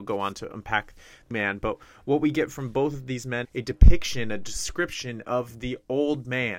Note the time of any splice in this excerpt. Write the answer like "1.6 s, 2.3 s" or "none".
1.3 s, 3.4 s